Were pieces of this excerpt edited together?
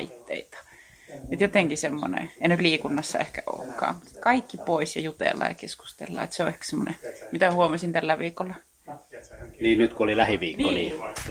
no; 0 cuts

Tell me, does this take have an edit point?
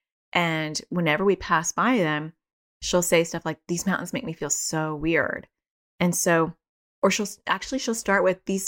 no; 0 cuts

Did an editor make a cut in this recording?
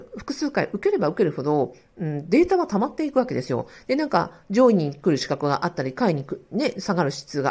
no; 0 cuts

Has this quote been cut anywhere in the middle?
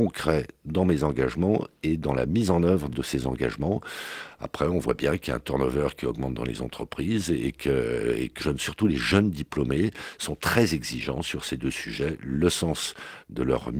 yes; 2 cuts; at 2.9 s, 8.4 s

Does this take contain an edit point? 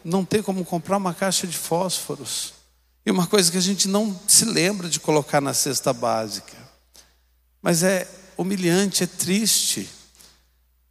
no; 0 cuts

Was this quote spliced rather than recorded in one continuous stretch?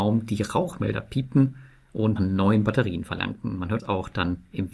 yes; 2 cuts; at 2.2 s, 3.8 s

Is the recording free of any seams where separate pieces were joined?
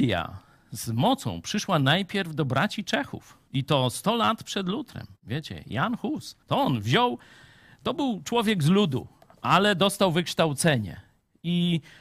no; 3 cuts; at 3.5 s, 5.2 s, 6.4 s

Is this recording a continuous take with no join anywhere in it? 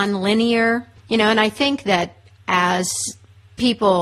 no; 1 cut; at 1.0 s

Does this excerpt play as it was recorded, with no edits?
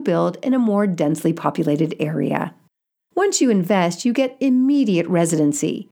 yes; 0 cuts

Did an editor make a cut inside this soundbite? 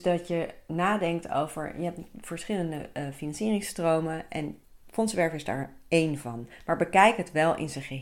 no; 0 cuts

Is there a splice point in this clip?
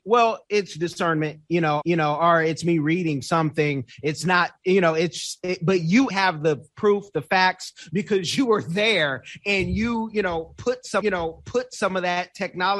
yes; 3 cuts; at 1.8 s, 6.1 s, 11.0 s

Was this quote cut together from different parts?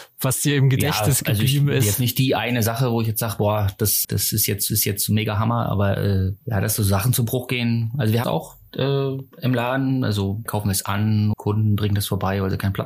yes; 7 cuts; at 4.0 s, 4.7 s, 6.4 s, 8.2 s, 9.3 s, 10.5 s, 11.3 s

